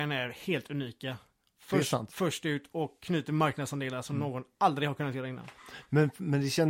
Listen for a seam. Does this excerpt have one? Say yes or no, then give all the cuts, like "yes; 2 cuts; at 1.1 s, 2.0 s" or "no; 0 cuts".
no; 0 cuts